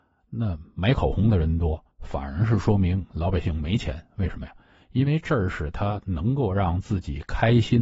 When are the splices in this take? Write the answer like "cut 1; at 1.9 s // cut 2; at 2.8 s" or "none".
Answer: cut 1; at 1.9 s